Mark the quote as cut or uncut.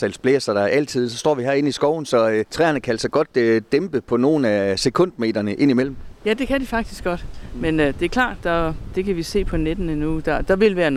cut